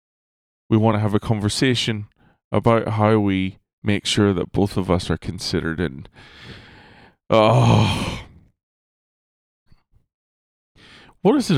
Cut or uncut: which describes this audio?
uncut